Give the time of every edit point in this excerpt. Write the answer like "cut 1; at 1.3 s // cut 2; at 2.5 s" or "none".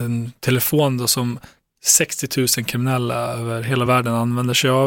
none